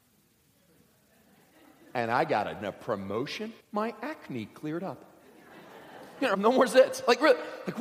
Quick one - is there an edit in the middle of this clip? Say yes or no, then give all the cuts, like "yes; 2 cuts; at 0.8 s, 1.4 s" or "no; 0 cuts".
yes; 3 cuts; at 2.6 s, 3.6 s, 6.3 s